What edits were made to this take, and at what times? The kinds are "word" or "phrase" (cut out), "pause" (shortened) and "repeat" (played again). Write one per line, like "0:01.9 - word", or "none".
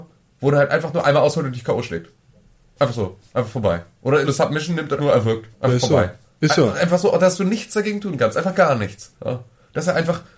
0:04.2 - word
0:05.0 - word
0:05.5 - pause
0:09.2 - pause